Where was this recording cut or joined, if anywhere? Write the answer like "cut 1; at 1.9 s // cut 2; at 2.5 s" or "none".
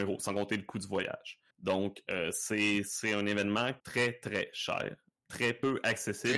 cut 1; at 1.5 s // cut 2; at 3.8 s